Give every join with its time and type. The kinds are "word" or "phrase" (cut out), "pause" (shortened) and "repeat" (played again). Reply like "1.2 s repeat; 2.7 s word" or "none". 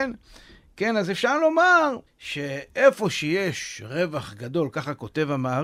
2.1 s pause